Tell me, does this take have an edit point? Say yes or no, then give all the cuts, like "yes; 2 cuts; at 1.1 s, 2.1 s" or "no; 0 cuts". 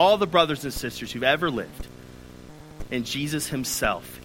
no; 0 cuts